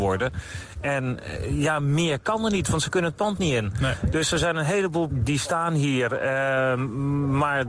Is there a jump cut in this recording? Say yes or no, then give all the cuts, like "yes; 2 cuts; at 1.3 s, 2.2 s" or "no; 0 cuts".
yes; 1 cut; at 5.1 s